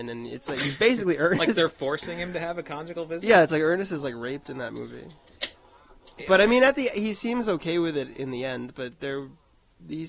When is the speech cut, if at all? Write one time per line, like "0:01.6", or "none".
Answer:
none